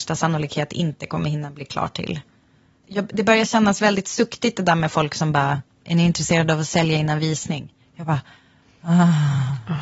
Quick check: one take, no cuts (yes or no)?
yes